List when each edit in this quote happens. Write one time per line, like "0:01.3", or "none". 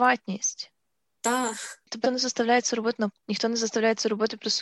0:02.0
0:03.1